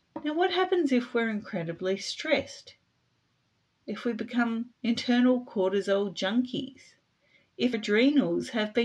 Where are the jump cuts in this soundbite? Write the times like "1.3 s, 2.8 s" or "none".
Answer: 4.7 s, 7.7 s